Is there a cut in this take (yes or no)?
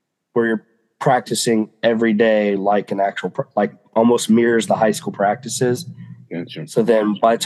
no